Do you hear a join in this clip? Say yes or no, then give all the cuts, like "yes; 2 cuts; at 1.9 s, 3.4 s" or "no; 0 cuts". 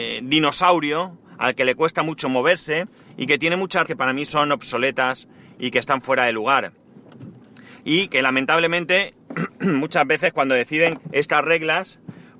yes; 2 cuts; at 3.8 s, 11.0 s